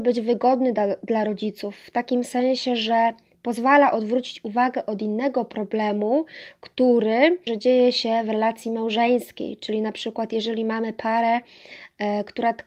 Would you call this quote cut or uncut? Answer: cut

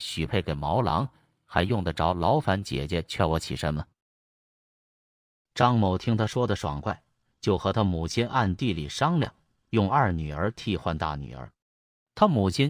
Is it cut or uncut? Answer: uncut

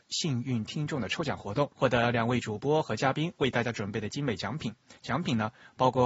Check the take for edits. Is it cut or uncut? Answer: cut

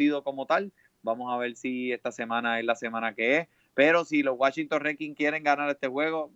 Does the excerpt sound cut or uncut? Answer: uncut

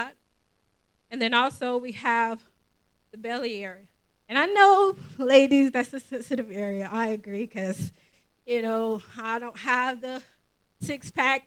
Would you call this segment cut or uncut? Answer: uncut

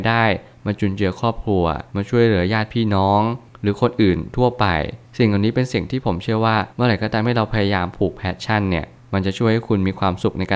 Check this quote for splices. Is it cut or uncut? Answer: cut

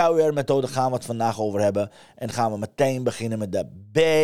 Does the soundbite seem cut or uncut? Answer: uncut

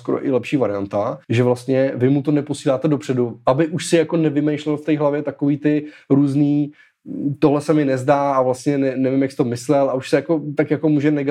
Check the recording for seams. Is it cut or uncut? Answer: cut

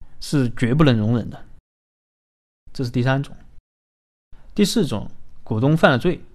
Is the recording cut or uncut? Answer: uncut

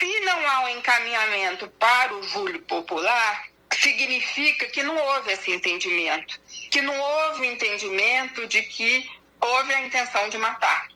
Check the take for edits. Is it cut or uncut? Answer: uncut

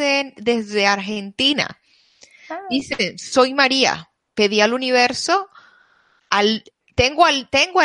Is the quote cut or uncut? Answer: uncut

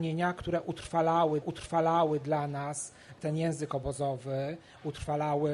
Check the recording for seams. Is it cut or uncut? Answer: cut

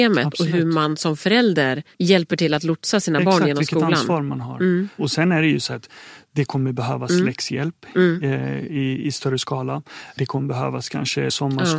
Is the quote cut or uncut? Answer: uncut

